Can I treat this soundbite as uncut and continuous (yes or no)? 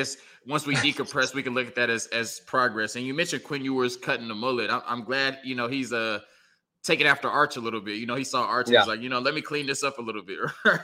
yes